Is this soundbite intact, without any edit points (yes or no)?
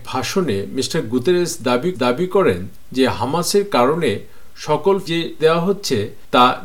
no